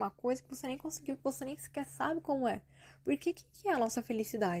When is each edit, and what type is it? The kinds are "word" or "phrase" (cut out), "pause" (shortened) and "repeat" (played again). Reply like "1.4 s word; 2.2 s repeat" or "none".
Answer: none